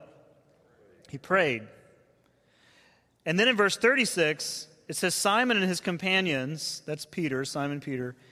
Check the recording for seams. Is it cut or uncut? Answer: uncut